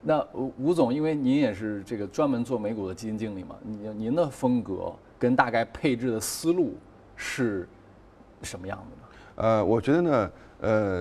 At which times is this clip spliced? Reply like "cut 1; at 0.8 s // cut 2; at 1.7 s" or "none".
none